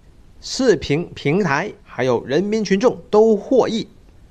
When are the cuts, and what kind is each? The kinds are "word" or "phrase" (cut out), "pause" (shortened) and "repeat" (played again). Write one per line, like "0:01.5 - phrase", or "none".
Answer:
0:01.8 - pause